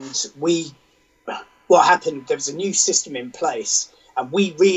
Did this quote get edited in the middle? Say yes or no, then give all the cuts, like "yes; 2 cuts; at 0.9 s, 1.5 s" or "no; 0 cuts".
no; 0 cuts